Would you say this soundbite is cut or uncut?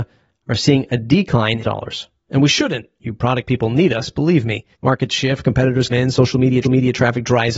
cut